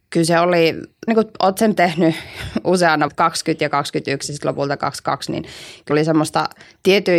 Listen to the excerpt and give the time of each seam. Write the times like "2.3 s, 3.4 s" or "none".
1.1 s, 1.8 s, 3.1 s, 5.9 s